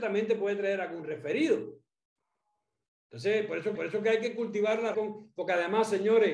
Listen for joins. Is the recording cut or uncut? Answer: cut